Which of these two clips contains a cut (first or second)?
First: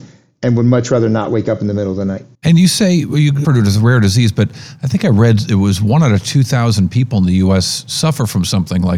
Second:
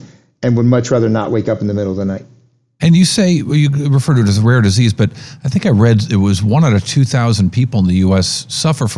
first